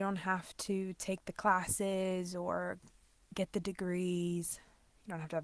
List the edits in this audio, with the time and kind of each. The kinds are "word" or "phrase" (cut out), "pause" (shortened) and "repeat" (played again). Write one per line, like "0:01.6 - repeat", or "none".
none

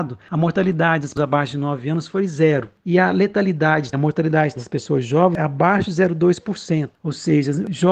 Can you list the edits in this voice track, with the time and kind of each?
0:01.2 - word
0:03.9 - word
0:04.6 - word

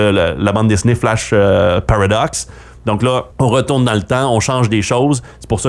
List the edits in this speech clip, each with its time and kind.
0:03.3 - pause

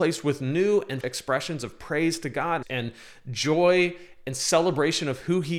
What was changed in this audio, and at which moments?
0:01.0 - word
0:02.6 - word

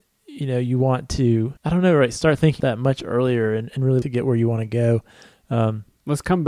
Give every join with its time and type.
0:01.6 - pause
0:02.6 - word
0:04.0 - phrase

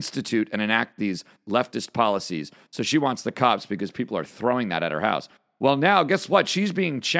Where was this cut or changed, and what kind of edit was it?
none

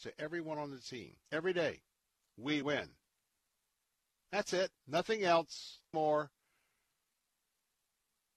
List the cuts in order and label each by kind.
0:01.2 - pause
0:02.6 - word
0:04.8 - pause
0:05.9 - word

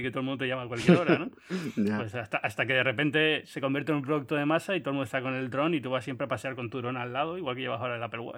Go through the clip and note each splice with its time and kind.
none

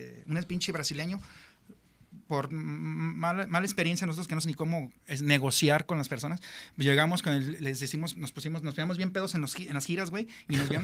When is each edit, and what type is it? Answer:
0:04.4 - word
0:05.0 - pause

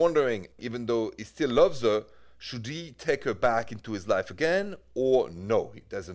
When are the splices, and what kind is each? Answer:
none

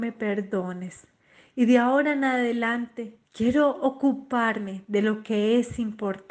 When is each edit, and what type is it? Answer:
0:01.2 - pause
0:03.2 - pause

